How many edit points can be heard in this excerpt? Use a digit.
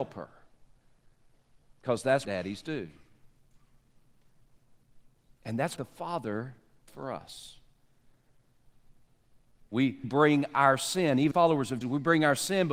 6